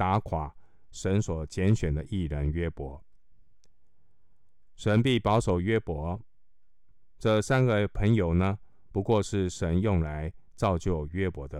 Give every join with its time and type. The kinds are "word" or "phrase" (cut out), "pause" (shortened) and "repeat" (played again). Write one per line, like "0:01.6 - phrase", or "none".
0:10.5 - pause

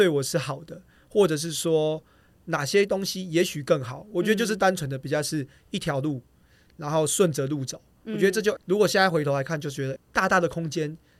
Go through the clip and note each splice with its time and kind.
0:08.6 - word
0:10.0 - word

